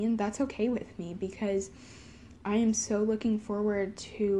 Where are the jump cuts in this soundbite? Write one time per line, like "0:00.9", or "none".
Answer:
none